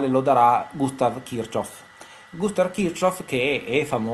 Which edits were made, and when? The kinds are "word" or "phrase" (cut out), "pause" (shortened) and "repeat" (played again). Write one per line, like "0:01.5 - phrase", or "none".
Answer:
none